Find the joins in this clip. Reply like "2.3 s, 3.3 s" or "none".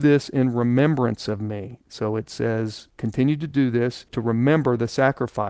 none

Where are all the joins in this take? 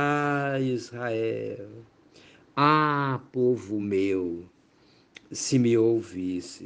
none

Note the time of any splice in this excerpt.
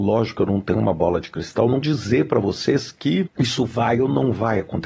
1.8 s, 3.3 s

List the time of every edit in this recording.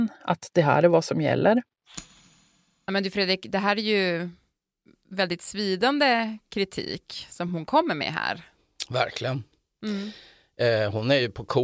none

